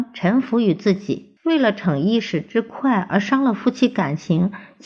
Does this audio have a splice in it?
yes; 1 cut; at 1.4 s

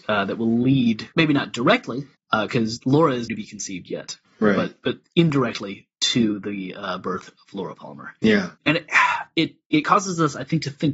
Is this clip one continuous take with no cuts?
no; 4 cuts; at 1.1 s, 2.1 s, 3.3 s, 8.6 s

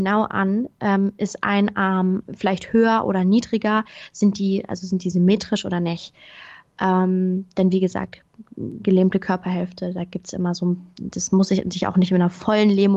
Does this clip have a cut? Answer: yes; 1 cut; at 2.2 s

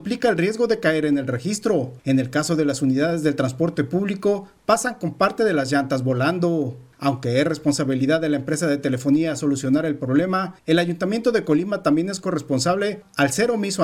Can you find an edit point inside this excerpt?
no; 0 cuts

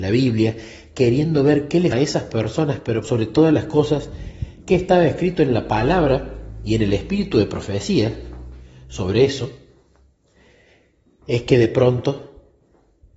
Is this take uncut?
no; 2 cuts; at 1.9 s, 3.0 s

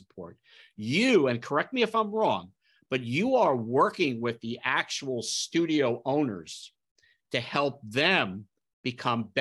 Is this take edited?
no; 0 cuts

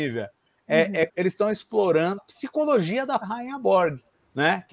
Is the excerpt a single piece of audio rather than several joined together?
no; 3 cuts; at 1.1 s, 2.2 s, 3.2 s

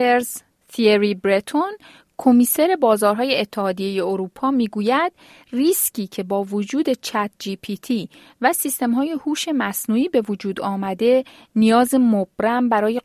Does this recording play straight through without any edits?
yes; 0 cuts

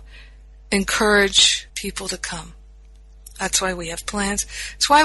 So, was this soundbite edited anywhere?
yes; 2 cuts; at 1.7 s, 4.1 s

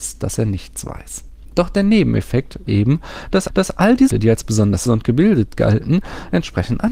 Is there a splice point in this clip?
yes; 4 cuts; at 2.7 s, 3.5 s, 4.1 s, 4.9 s

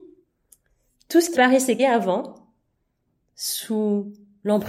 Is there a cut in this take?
yes; 2 cuts; at 1.3 s, 1.8 s

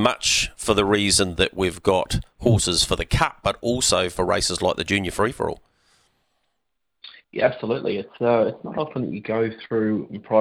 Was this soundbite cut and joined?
no; 0 cuts

